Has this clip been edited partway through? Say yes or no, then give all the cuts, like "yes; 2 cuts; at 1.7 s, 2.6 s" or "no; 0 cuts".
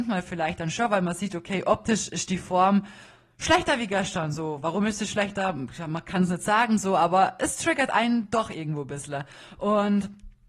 no; 0 cuts